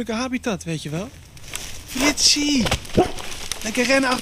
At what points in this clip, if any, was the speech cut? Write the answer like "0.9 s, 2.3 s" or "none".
1.9 s